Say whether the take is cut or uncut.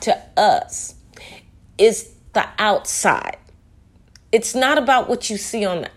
cut